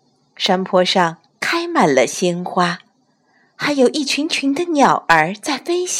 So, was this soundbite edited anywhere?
no; 0 cuts

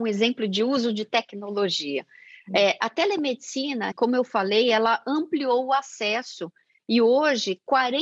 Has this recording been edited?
yes; 1 cut; at 3.9 s

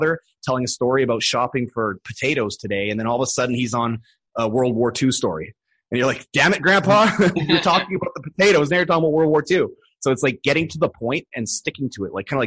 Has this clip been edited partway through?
no; 0 cuts

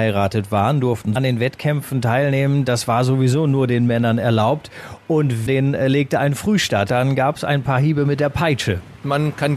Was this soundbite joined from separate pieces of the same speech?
yes; 3 cuts; at 1.2 s, 5.5 s, 6.9 s

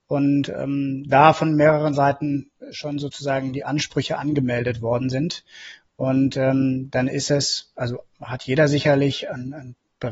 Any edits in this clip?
yes; 1 cut; at 8.1 s

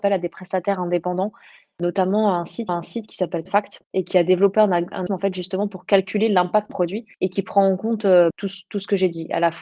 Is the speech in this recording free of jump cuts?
no; 7 cuts; at 2.7 s, 3.5 s, 3.8 s, 5.1 s, 6.7 s, 7.1 s, 8.3 s

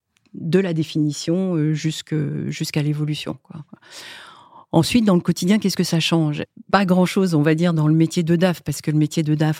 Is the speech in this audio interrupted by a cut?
no; 0 cuts

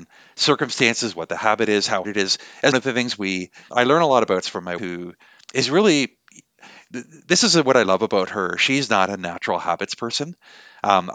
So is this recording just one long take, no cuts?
no; 6 cuts; at 2.0 s, 2.7 s, 3.7 s, 4.4 s, 4.8 s, 5.4 s

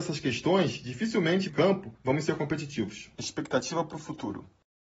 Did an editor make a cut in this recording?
yes; 2 cuts; at 1.5 s, 1.9 s

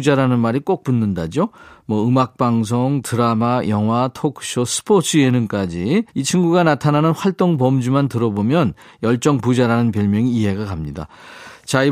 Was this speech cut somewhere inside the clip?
yes; 1 cut; at 6.1 s

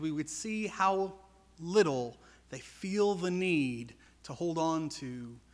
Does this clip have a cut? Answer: no; 0 cuts

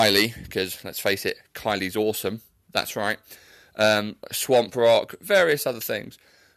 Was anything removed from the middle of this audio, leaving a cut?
no; 0 cuts

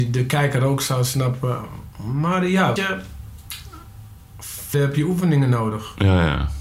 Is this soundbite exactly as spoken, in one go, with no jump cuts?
no; 2 cuts; at 2.8 s, 4.7 s

